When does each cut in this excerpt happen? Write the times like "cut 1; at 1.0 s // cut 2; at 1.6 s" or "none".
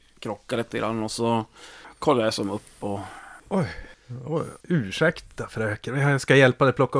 cut 1; at 3.4 s // cut 2; at 4.6 s